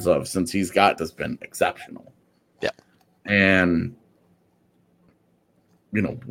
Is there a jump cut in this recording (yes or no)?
yes